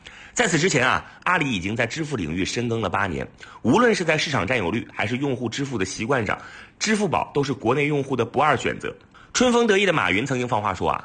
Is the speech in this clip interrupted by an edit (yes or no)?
no